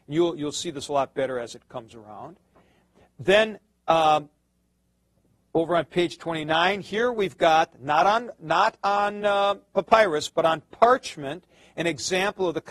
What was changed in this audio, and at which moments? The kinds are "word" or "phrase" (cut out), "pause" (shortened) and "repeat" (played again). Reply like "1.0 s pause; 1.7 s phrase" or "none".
none